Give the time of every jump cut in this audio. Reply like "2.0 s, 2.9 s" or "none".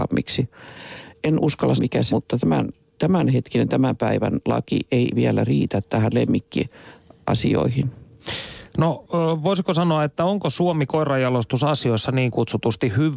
1.8 s, 2.1 s